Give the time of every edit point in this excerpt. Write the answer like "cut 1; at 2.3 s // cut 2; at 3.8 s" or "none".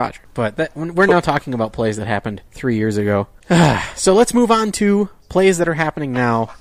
cut 1; at 2.5 s